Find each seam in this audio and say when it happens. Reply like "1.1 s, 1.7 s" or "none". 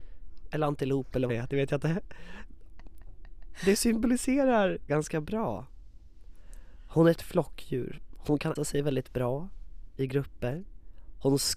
1.3 s, 4.9 s, 7.2 s, 8.6 s